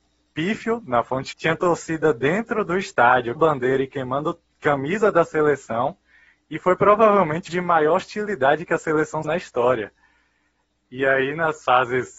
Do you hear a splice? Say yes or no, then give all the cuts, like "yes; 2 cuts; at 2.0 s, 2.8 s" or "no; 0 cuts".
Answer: yes; 4 cuts; at 1.3 s, 3.4 s, 7.5 s, 9.2 s